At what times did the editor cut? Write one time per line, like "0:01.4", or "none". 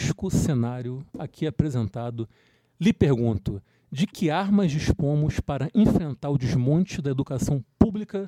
none